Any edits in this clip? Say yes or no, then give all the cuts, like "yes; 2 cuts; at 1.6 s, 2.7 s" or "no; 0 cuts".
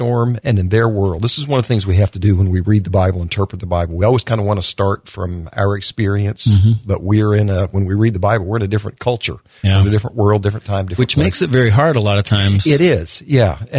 no; 0 cuts